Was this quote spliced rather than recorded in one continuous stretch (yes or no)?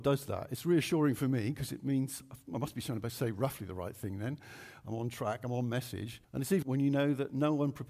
yes